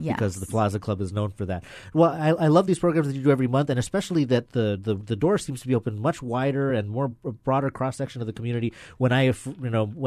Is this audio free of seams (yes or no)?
yes